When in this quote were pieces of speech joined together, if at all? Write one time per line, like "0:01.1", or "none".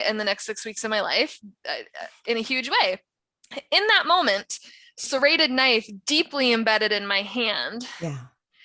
none